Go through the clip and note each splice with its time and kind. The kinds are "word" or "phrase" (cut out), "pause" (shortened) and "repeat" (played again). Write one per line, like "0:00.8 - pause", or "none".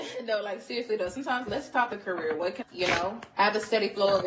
0:01.5 - word
0:01.9 - word
0:02.6 - phrase
0:03.3 - pause